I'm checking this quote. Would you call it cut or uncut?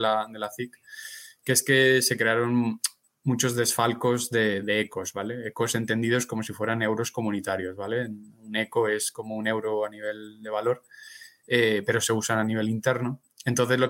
uncut